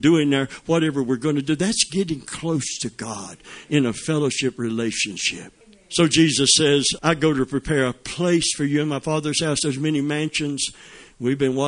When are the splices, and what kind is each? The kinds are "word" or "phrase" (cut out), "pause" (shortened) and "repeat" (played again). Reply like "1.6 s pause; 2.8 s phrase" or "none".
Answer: 5.6 s pause; 7.0 s word